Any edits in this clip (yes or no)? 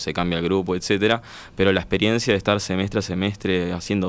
no